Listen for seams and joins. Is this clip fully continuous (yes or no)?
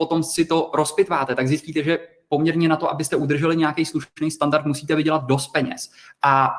yes